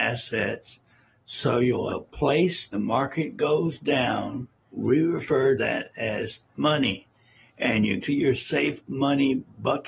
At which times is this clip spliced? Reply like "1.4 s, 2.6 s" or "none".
1.9 s, 2.7 s, 4.7 s, 5.6 s, 6.5 s, 8.0 s